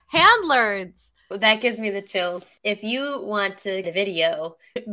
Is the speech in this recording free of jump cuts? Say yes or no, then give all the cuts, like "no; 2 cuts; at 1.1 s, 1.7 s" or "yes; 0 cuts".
no; 2 cuts; at 1.2 s, 3.8 s